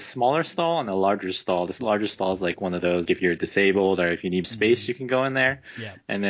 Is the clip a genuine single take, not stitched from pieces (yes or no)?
no